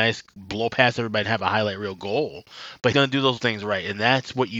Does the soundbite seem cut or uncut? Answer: cut